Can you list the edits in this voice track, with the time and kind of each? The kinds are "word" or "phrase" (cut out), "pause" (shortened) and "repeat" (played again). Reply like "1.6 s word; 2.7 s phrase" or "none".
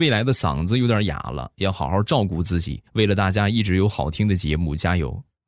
2.9 s pause